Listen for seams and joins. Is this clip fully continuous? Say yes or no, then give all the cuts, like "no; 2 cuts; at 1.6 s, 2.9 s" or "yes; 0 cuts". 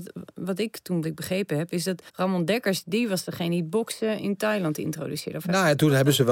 no; 2 cuts; at 1.0 s, 2.1 s